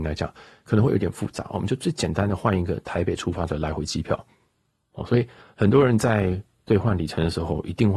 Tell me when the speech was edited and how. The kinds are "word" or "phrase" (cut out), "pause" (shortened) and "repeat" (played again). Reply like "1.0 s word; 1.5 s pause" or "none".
none

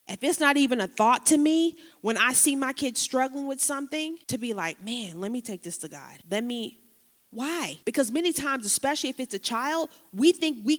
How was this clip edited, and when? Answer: 4.2 s pause; 6.2 s pause; 7.8 s pause

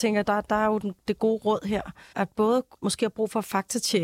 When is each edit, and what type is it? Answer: 2.1 s word; 2.8 s phrase

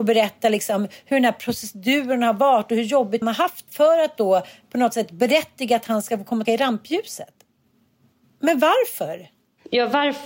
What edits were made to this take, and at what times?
3.2 s word; 3.7 s word; 6.4 s word

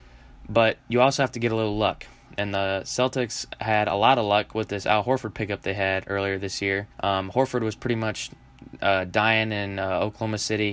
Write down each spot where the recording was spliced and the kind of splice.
6.9 s pause

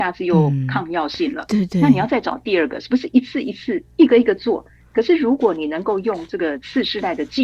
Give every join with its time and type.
none

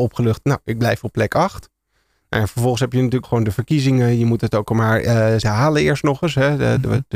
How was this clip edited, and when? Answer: 3.2 s word; 5.4 s word

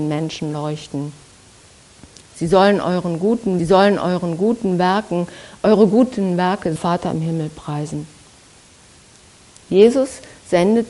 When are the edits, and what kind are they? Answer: 3.6 s repeat; 6.8 s phrase

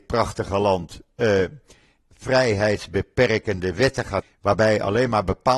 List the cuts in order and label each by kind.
4.2 s word

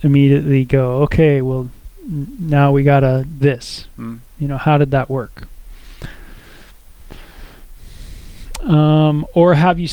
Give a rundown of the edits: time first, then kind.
3.4 s word

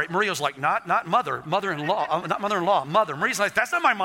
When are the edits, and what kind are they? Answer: none

